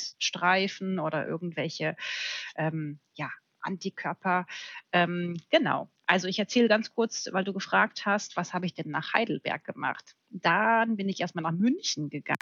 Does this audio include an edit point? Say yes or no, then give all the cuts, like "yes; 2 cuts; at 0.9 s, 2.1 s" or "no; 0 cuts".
no; 0 cuts